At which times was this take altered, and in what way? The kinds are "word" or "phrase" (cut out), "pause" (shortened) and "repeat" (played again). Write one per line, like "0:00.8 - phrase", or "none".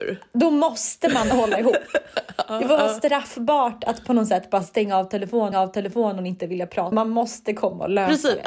0:05.5 - repeat
0:06.9 - word